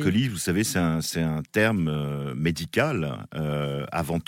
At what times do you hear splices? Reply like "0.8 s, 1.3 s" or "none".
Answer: none